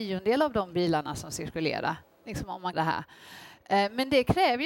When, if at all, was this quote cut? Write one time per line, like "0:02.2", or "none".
0:02.7